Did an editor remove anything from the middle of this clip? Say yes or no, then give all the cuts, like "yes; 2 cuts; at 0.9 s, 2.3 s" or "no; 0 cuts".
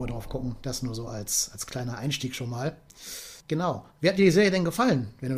yes; 1 cut; at 3.4 s